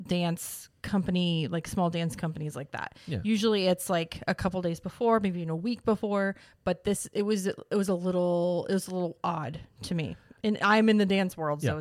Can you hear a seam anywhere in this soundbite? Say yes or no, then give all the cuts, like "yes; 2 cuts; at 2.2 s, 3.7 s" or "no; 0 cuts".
no; 0 cuts